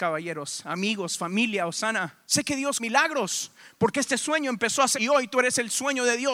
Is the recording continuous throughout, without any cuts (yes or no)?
no